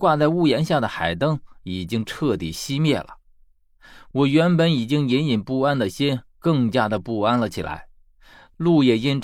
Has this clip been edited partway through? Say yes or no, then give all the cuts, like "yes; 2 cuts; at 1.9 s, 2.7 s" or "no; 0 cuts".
no; 0 cuts